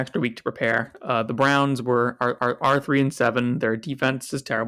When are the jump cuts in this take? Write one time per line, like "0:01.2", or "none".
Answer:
0:02.4